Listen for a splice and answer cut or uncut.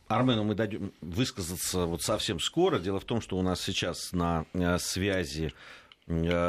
uncut